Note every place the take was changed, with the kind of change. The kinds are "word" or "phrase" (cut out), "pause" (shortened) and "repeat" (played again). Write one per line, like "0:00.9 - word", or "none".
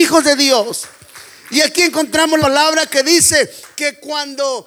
0:02.4 - word

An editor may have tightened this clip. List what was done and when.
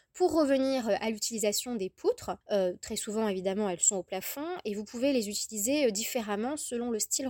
0:02.4 - pause

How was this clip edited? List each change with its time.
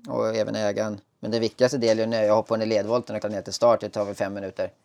0:01.0 - pause
0:02.5 - word
0:03.2 - word

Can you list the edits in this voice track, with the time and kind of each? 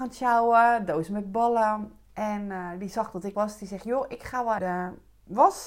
0:03.3 - word
0:04.6 - word

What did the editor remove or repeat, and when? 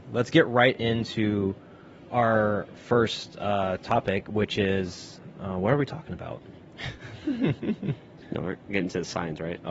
none

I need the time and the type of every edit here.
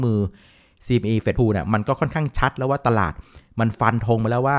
0:01.4 - word

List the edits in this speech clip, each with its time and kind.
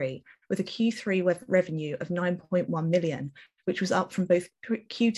none

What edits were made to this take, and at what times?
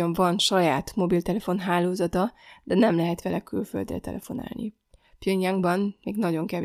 none

